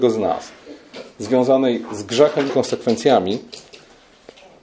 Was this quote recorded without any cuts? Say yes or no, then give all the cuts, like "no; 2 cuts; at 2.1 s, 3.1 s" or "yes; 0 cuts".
no; 1 cut; at 2.5 s